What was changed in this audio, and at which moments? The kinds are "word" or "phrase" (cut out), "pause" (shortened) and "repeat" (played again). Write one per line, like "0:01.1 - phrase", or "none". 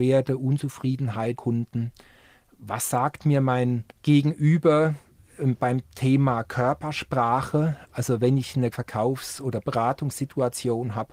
0:01.4 - phrase
0:03.9 - pause
0:08.7 - word